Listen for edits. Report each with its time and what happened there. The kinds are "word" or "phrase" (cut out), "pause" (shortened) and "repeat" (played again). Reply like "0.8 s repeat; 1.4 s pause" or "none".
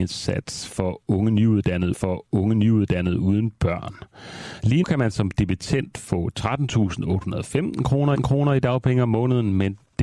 1.9 s repeat; 4.8 s word; 8.2 s repeat